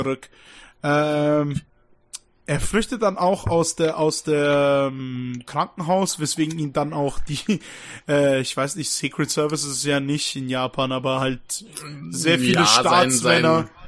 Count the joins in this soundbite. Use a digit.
0